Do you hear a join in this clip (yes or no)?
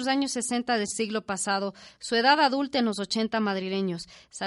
no